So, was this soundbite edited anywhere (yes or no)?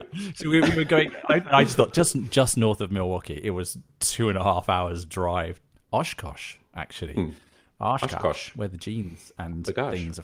no